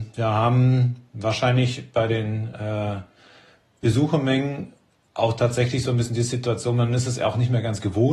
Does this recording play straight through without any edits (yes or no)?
yes